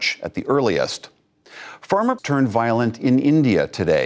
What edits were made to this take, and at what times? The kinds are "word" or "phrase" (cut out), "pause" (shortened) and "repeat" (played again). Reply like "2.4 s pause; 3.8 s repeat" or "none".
2.2 s word